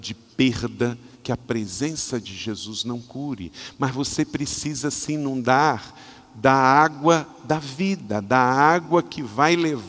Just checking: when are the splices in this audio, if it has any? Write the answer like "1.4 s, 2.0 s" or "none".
1.1 s